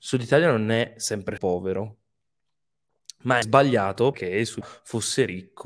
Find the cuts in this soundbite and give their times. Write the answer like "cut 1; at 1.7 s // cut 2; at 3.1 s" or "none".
cut 1; at 1.4 s // cut 2; at 3.4 s // cut 3; at 4.1 s // cut 4; at 4.6 s